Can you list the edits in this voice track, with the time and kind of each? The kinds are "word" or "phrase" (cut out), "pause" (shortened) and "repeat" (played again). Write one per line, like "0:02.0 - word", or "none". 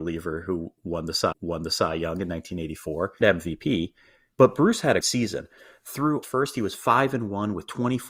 0:01.3 - repeat
0:03.2 - word
0:05.0 - word
0:06.2 - word